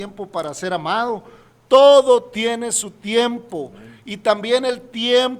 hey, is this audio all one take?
yes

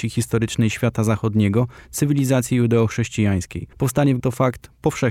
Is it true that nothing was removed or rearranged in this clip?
no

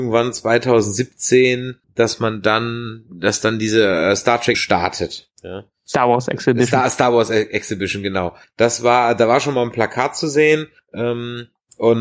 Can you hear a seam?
yes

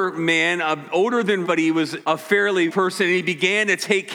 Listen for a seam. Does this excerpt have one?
yes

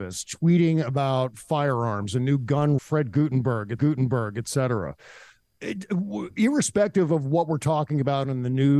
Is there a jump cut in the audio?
yes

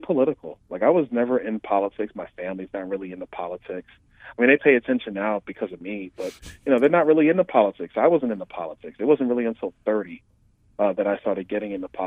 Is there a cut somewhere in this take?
no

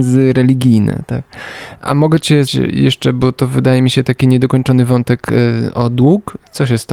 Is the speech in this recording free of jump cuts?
no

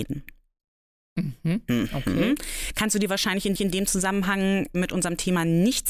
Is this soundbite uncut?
no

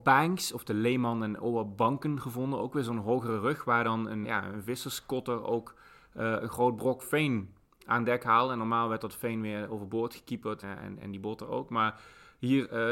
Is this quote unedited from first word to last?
no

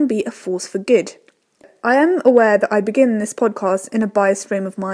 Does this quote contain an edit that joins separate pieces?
no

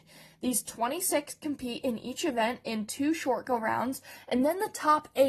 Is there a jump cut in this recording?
no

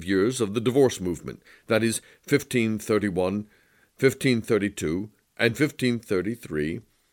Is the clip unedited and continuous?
yes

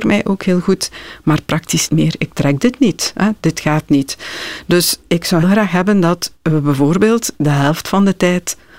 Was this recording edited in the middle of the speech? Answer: yes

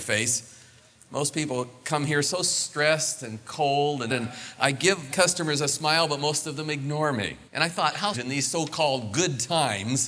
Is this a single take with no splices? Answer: no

